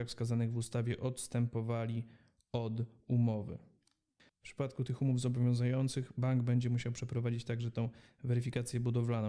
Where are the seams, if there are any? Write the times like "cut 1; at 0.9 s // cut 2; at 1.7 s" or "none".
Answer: none